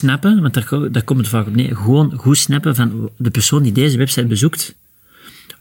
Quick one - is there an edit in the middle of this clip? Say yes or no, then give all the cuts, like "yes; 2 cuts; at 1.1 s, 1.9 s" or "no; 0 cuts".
no; 0 cuts